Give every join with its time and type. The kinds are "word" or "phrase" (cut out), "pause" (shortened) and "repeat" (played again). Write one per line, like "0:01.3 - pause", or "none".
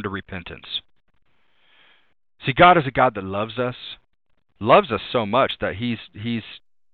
none